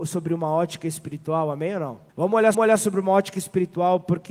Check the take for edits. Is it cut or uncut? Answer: cut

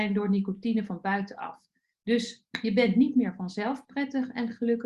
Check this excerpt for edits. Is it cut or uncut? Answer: uncut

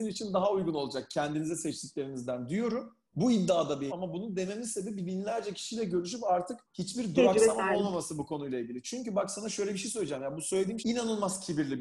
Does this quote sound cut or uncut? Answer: cut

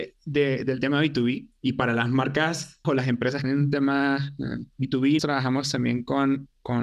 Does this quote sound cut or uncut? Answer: cut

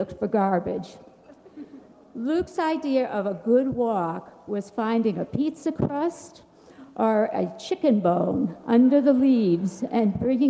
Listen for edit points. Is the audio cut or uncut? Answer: uncut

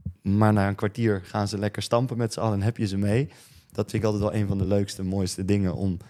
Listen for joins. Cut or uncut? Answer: uncut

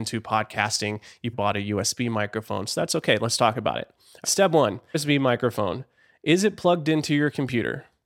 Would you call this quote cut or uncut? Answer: cut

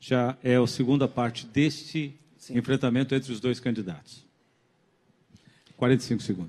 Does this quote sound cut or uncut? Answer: uncut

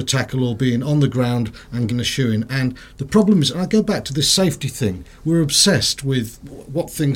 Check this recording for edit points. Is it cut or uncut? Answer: cut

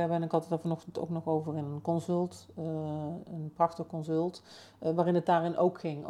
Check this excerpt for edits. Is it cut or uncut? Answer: uncut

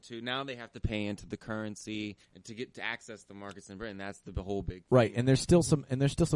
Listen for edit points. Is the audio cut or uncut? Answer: cut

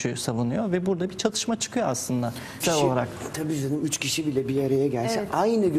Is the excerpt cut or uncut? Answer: cut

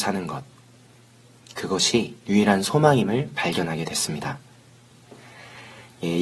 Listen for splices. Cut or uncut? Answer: uncut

